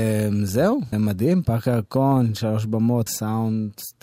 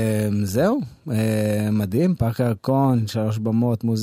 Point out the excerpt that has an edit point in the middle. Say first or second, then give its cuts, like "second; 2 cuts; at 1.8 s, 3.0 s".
first; 2 cuts; at 0.9 s, 3.1 s